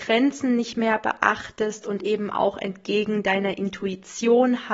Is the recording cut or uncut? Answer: uncut